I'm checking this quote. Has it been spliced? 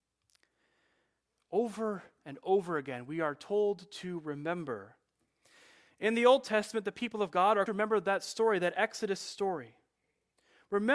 yes; 1 cut; at 7.7 s

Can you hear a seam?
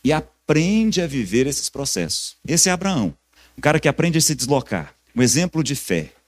yes; 3 cuts; at 2.4 s, 3.3 s, 5.1 s

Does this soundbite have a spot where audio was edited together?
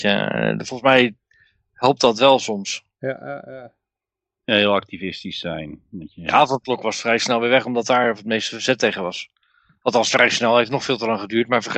no; 0 cuts

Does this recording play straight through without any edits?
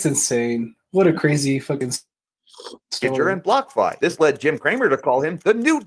no; 1 cut; at 2.8 s

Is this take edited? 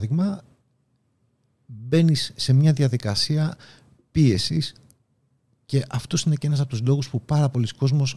no; 0 cuts

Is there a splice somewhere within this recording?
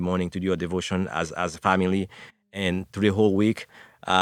no; 0 cuts

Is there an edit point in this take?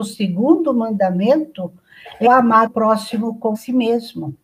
yes; 3 cuts; at 2.3 s, 2.7 s, 3.5 s

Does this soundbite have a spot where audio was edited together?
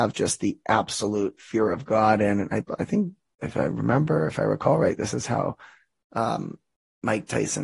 no; 0 cuts

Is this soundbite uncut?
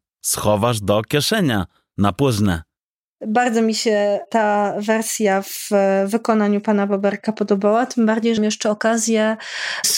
no; 1 cut; at 8.4 s

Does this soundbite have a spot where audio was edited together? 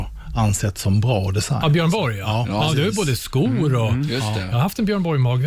no; 0 cuts

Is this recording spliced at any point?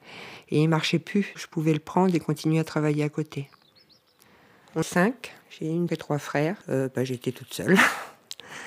yes; 5 cuts; at 1.4 s, 4.8 s, 5.4 s, 5.9 s, 6.6 s

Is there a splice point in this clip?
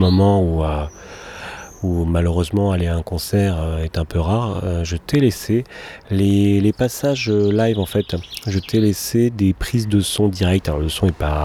no; 0 cuts

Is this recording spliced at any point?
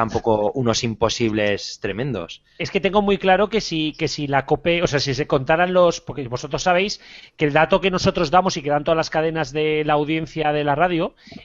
no; 0 cuts

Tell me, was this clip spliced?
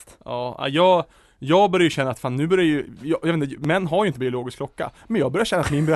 no; 0 cuts

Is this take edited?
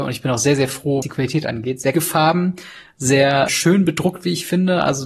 yes; 3 cuts; at 1.0 s, 1.9 s, 3.5 s

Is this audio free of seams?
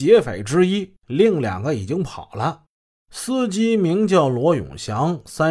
yes; 0 cuts

